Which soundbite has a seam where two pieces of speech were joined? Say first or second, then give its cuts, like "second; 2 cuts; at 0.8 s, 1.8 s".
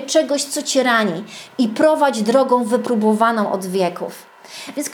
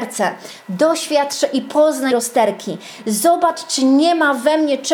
second; 1 cut; at 2.1 s